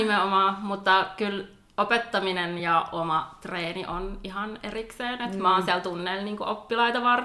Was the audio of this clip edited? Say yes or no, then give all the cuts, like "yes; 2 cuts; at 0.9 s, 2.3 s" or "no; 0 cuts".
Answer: no; 0 cuts